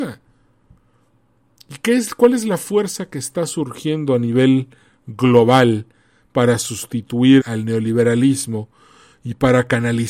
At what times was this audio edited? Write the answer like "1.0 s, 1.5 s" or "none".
7.4 s